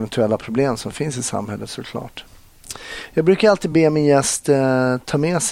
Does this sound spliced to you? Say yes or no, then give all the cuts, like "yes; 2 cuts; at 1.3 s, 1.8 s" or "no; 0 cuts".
no; 0 cuts